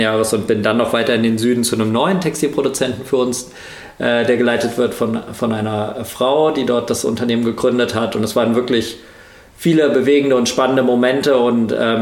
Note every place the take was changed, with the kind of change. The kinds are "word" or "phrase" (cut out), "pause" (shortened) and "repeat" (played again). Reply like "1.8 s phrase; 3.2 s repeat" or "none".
none